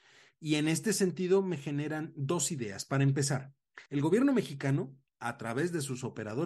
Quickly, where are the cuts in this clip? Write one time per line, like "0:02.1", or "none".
0:03.9